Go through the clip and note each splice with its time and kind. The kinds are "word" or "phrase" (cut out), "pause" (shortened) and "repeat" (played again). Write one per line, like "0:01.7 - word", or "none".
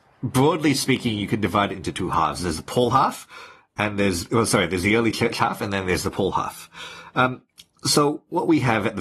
none